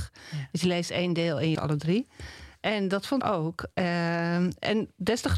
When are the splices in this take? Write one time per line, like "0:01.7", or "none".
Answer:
0:01.6
0:03.2